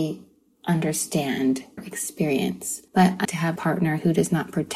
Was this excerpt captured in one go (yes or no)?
no